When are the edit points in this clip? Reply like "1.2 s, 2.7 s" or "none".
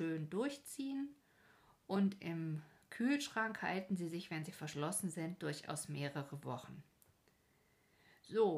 none